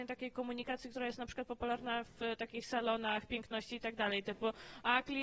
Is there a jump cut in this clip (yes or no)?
no